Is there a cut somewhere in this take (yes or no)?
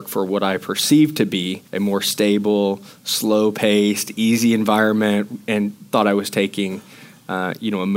yes